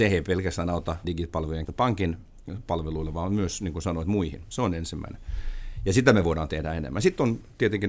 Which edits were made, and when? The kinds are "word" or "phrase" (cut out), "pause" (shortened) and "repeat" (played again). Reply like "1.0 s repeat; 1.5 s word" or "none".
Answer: 1.0 s word; 1.7 s word